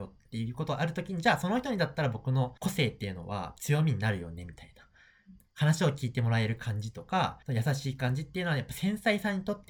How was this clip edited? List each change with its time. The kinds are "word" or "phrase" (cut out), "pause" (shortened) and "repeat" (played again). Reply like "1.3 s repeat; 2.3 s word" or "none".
2.6 s pause; 7.4 s pause